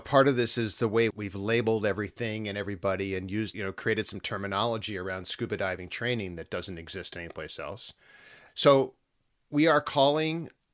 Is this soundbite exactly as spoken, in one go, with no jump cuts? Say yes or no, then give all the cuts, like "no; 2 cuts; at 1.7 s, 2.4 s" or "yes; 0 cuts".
no; 3 cuts; at 1.1 s, 3.5 s, 8.5 s